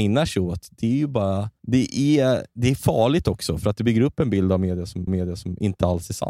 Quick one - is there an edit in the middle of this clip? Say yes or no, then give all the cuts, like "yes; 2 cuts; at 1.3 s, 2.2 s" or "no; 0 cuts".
yes; 2 cuts; at 1.6 s, 5.1 s